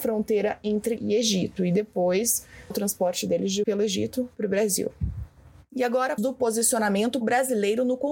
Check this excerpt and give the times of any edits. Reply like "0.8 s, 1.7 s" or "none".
1.0 s, 2.7 s, 3.6 s, 6.2 s, 7.2 s